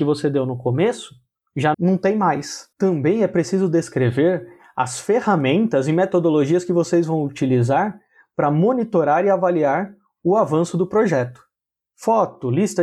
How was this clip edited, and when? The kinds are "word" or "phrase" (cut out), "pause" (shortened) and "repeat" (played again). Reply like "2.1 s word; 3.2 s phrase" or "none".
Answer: 1.7 s word; 2.7 s pause